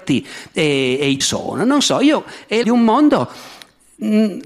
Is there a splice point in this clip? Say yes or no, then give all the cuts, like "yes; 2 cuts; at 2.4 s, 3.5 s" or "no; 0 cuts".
yes; 2 cuts; at 1.2 s, 2.6 s